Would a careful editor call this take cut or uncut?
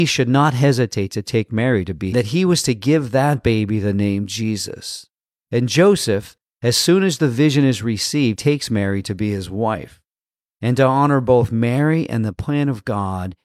cut